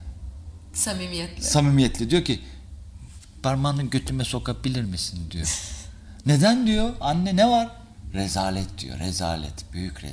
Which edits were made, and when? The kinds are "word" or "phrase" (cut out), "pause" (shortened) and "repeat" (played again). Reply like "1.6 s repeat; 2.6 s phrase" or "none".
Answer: none